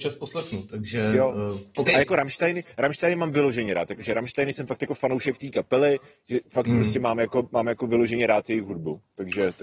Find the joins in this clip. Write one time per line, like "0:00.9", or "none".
none